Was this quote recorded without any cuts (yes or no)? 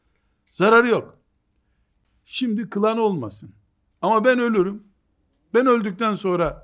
yes